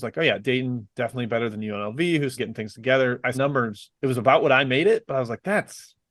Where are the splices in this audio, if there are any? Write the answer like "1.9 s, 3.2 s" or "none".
0.9 s, 2.4 s, 3.3 s, 4.0 s